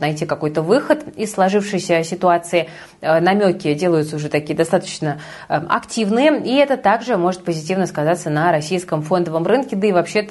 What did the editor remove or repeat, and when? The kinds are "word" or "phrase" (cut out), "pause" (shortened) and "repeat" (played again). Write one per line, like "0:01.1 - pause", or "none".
none